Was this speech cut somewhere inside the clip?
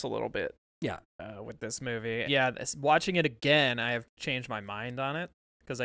yes; 1 cut; at 2.2 s

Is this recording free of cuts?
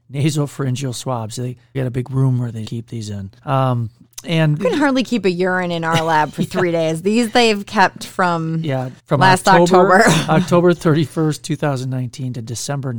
no; 5 cuts; at 1.7 s, 2.6 s, 3.4 s, 4.6 s, 9.0 s

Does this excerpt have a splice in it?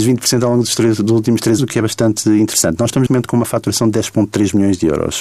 yes; 2 cuts; at 1.6 s, 3.1 s

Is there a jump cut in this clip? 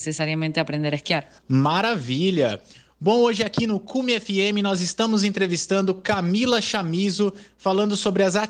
no; 0 cuts

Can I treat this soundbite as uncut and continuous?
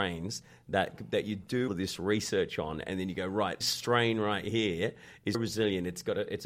no; 3 cuts; at 1.7 s, 3.6 s, 5.3 s

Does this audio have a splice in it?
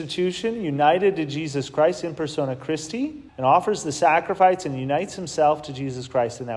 yes; 1 cut; at 3.3 s

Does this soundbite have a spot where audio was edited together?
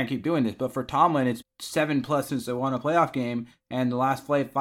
yes; 2 cuts; at 1.4 s, 2.3 s

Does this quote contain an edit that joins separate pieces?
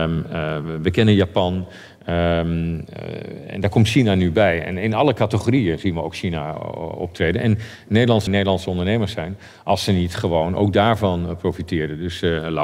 yes; 1 cut; at 8.3 s

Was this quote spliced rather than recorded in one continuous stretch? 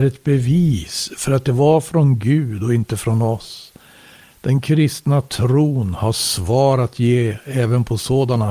no; 0 cuts

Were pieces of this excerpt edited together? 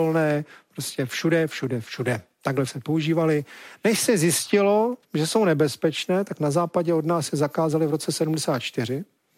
yes; 2 cuts; at 2.7 s, 5.0 s

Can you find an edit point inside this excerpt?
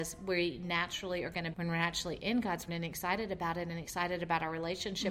yes; 2 cuts; at 1.5 s, 2.7 s

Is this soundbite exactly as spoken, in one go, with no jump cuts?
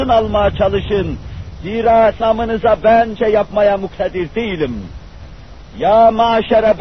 no; 2 cuts; at 2.2 s, 3.2 s

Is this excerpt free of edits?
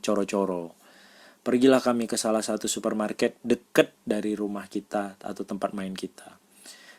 yes; 0 cuts

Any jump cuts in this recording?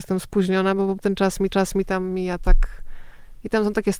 yes; 2 cuts; at 1.0 s, 1.5 s

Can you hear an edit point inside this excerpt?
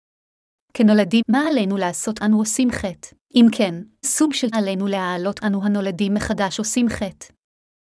yes; 6 cuts; at 1.2 s, 2.2 s, 3.2 s, 4.0 s, 4.5 s, 5.4 s

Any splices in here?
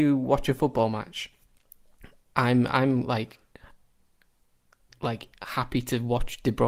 no; 0 cuts

